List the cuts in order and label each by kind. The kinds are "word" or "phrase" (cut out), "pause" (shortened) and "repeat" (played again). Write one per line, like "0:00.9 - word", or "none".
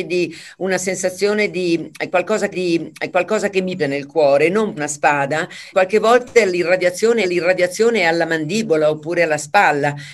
0:02.5 - repeat
0:03.8 - word
0:04.8 - word
0:05.7 - word
0:07.2 - repeat